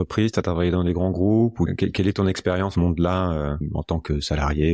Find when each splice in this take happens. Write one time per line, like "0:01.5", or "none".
0:02.7